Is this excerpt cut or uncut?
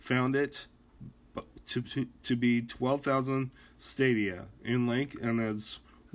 uncut